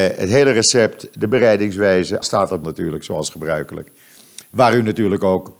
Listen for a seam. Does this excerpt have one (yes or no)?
yes